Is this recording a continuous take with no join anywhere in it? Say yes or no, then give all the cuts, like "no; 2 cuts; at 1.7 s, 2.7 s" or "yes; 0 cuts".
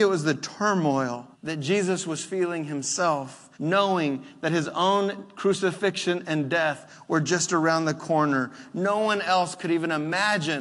no; 2 cuts; at 1.3 s, 3.5 s